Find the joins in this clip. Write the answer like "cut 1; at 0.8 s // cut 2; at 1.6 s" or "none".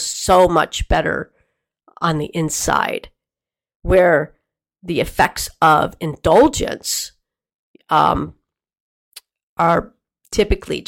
none